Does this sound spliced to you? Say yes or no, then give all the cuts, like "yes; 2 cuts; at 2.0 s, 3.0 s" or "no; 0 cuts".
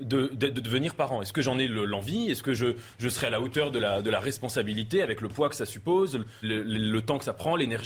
yes; 1 cut; at 6.4 s